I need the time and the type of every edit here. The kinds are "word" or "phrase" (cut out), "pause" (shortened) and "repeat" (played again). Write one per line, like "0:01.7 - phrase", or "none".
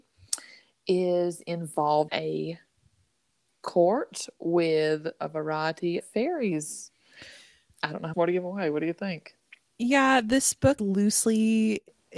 0:02.1 - word
0:03.5 - word
0:06.0 - word
0:08.1 - word
0:10.8 - word